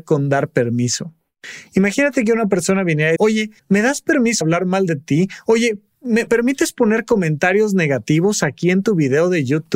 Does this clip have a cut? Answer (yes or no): yes